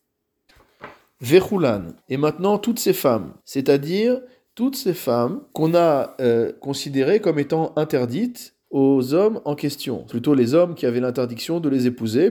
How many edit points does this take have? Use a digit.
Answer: 5